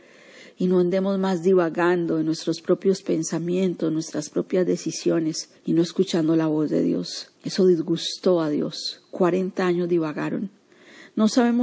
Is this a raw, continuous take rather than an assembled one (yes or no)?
no